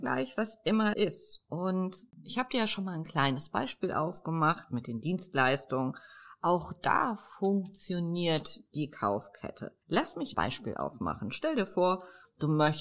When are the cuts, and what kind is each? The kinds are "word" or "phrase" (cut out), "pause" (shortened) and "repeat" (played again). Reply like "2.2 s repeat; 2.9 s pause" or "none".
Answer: 0.9 s word; 2.1 s pause; 9.8 s pause; 10.3 s phrase